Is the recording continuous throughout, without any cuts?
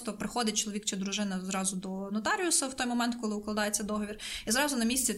yes; 0 cuts

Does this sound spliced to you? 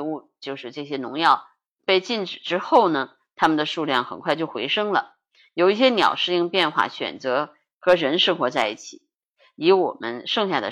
no; 0 cuts

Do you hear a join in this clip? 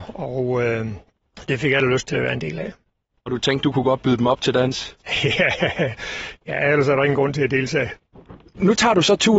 no; 0 cuts

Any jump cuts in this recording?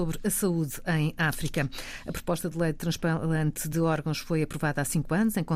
no; 0 cuts

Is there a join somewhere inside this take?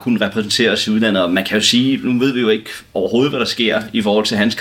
no; 0 cuts

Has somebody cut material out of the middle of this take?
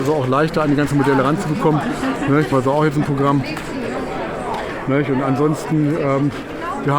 yes; 1 cut; at 2.5 s

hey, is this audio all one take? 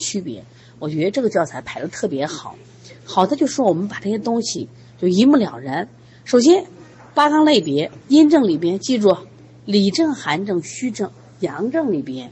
yes; 0 cuts

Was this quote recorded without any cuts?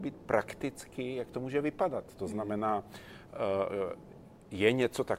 yes; 0 cuts

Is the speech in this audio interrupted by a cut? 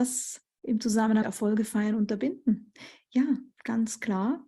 yes; 1 cut; at 1.2 s

